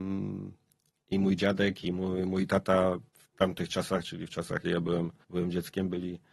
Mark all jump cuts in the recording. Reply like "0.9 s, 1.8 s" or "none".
3.1 s, 4.6 s, 5.2 s